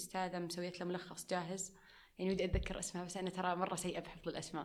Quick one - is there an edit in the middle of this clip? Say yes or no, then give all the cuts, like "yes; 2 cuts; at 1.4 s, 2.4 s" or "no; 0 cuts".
no; 0 cuts